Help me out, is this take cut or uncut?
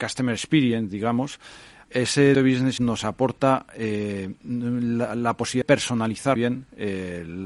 cut